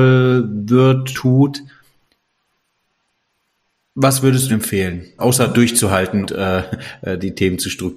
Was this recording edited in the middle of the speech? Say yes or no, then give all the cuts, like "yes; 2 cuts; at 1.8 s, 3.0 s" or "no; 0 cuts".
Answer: yes; 4 cuts; at 1.1 s, 4.5 s, 5.2 s, 6.3 s